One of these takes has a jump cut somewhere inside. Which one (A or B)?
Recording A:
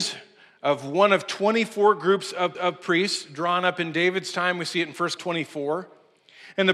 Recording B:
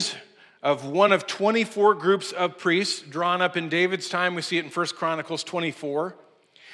A